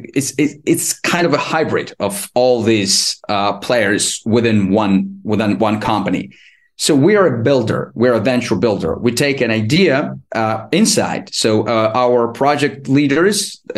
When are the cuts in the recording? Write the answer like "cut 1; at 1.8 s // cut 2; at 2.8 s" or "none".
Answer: cut 1; at 10.3 s